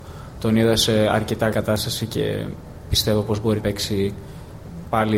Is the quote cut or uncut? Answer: cut